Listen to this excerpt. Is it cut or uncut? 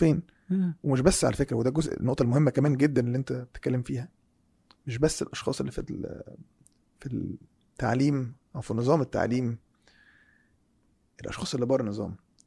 uncut